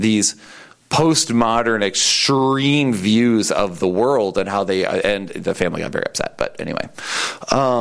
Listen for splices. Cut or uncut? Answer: uncut